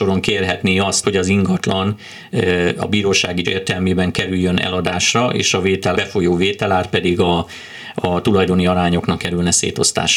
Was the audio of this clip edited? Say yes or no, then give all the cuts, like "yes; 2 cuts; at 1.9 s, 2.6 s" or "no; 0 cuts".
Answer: yes; 4 cuts; at 1.0 s, 3.4 s, 5.9 s, 9.2 s